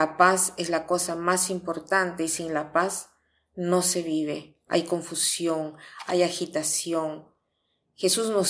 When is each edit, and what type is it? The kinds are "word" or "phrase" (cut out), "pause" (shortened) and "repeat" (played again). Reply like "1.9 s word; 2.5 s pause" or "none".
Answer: none